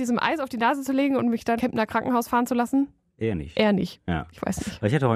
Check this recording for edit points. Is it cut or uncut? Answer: cut